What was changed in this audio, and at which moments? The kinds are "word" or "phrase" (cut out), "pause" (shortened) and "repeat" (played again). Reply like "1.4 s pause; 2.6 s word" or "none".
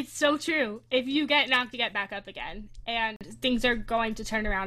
1.7 s phrase